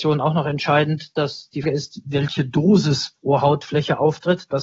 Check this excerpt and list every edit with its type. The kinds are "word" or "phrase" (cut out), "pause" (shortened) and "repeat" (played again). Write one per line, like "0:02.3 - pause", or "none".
0:01.6 - word